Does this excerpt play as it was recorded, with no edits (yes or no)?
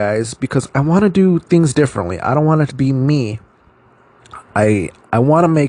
no